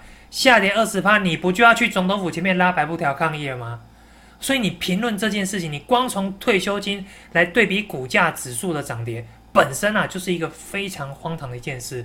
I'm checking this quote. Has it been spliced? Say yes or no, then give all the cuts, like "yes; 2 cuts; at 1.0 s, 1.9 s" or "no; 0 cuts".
no; 0 cuts